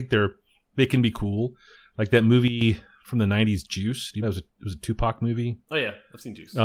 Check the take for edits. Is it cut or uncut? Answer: cut